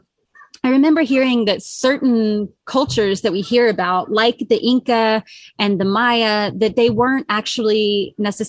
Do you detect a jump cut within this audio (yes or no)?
no